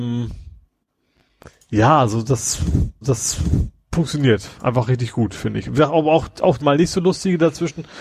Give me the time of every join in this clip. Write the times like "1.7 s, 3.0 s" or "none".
3.0 s, 6.6 s